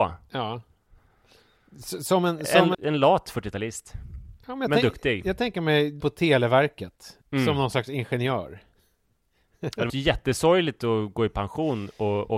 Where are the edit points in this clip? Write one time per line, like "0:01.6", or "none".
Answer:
0:02.7
0:06.0
0:07.2
0:09.9